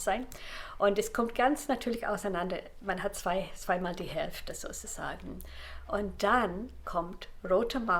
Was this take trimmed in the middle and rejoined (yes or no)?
no